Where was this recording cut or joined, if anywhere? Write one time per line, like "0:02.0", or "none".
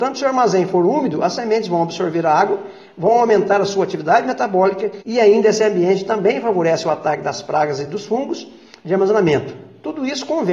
none